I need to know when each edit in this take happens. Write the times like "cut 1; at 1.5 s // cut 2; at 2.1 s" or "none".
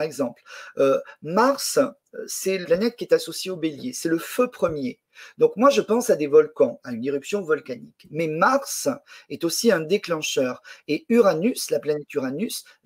cut 1; at 2.6 s // cut 2; at 6.8 s